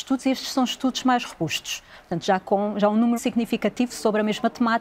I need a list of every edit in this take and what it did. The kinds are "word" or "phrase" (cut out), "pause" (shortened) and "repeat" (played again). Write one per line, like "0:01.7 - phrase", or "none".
0:03.1 - word

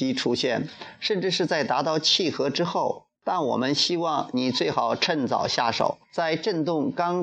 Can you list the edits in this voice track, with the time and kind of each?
0:03.2 - pause
0:06.0 - pause

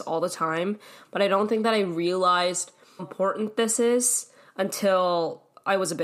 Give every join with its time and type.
0:03.0 - word

